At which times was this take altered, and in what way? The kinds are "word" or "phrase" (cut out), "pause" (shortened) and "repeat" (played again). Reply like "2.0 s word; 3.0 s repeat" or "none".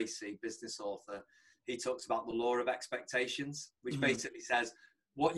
none